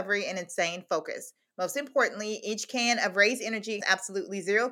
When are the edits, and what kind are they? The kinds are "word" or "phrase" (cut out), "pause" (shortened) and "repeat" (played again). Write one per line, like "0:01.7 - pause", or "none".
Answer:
0:03.8 - word